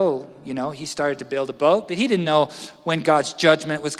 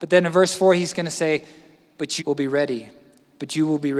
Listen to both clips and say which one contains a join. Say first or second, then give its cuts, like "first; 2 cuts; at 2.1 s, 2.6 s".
second; 1 cut; at 2.2 s